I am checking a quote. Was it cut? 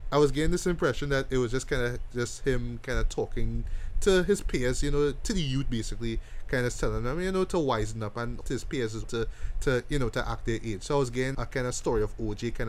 yes; 3 cuts; at 8.4 s, 9.0 s, 11.3 s

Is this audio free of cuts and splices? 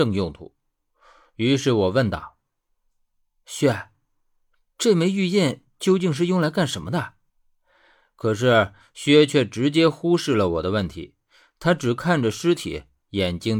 no; 1 cut; at 7.3 s

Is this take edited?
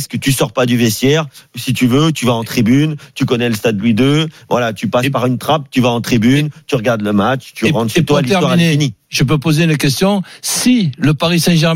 no; 0 cuts

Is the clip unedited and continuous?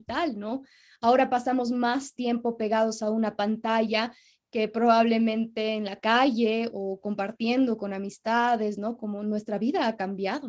yes; 0 cuts

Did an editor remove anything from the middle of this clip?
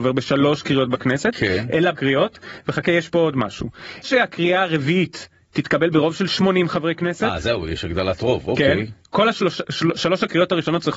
yes; 2 cuts; at 1.9 s, 4.0 s

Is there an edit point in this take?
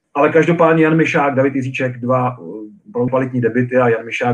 yes; 1 cut; at 3.1 s

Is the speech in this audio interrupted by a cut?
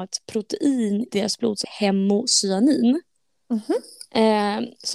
yes; 2 cuts; at 1.1 s, 1.6 s

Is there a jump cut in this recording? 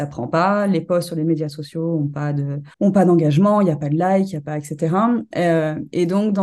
yes; 1 cut; at 2.7 s

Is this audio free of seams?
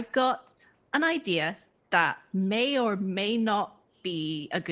yes; 0 cuts

